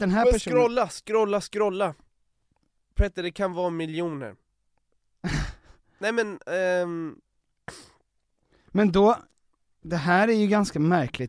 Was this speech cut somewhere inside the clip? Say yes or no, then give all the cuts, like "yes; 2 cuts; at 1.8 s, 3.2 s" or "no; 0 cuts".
no; 0 cuts